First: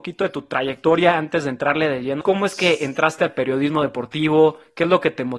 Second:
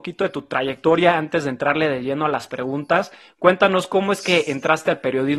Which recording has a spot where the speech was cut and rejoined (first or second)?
first